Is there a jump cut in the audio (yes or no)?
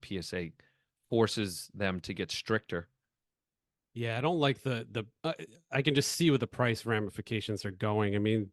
no